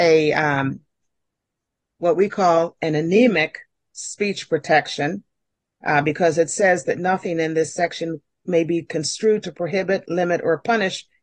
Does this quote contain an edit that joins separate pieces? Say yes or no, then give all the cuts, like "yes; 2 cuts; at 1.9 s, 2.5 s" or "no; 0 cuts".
no; 0 cuts